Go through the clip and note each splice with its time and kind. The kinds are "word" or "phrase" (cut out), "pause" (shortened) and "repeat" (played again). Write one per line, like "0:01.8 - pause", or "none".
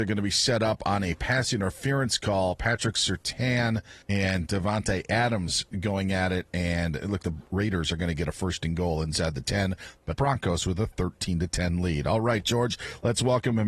0:04.0 - pause
0:07.2 - word
0:10.1 - phrase